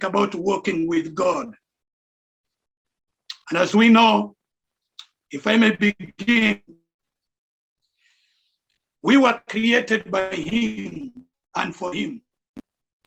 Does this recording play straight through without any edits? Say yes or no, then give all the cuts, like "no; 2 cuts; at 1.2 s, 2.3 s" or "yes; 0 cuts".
no; 1 cut; at 3.4 s